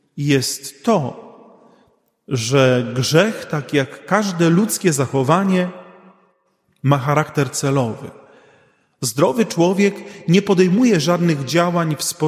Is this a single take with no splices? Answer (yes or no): yes